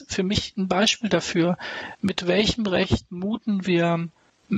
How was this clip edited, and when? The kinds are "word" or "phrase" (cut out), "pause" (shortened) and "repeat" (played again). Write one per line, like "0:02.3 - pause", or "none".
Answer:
none